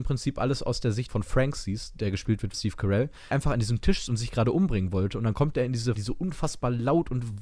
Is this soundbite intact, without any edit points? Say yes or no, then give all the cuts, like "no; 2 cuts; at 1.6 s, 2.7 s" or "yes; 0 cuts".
no; 5 cuts; at 1.1 s, 2.5 s, 3.3 s, 4.1 s, 5.9 s